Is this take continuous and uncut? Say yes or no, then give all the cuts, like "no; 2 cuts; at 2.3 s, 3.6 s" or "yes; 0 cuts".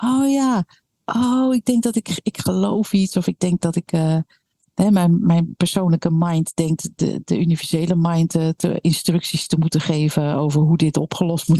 yes; 0 cuts